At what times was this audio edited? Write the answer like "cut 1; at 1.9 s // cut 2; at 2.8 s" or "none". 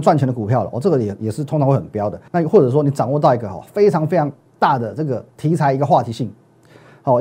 cut 1; at 2.3 s